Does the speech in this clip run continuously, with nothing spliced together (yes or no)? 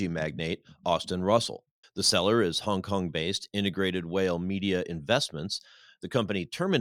no